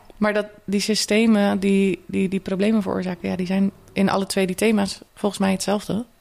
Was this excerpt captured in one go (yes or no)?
no